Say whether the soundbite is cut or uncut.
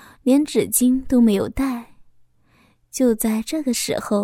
uncut